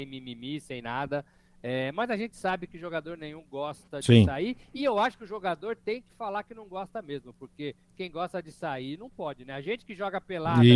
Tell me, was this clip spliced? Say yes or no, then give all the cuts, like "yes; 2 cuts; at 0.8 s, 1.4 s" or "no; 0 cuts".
no; 0 cuts